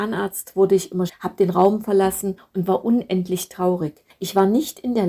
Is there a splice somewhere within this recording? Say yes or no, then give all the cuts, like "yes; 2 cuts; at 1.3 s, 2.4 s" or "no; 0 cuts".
yes; 1 cut; at 1.1 s